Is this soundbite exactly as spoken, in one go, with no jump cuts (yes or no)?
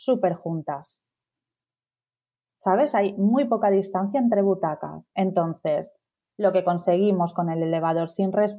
yes